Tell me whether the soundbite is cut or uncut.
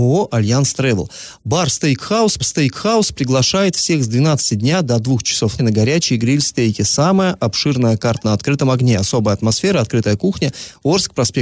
cut